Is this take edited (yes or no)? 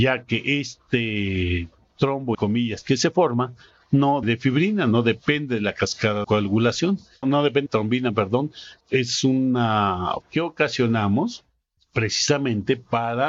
yes